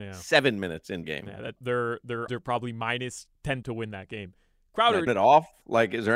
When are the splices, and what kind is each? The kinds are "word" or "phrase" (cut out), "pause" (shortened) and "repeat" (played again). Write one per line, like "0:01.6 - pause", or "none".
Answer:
0:01.0 - word
0:01.6 - word
0:02.3 - word
0:03.6 - word
0:05.1 - word